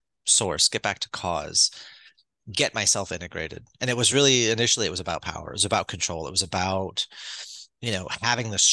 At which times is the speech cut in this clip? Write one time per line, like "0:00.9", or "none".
none